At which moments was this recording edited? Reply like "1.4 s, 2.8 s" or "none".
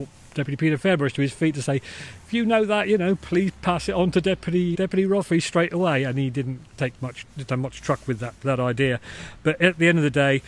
4.7 s, 8.4 s